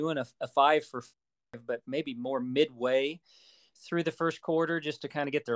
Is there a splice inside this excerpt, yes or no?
no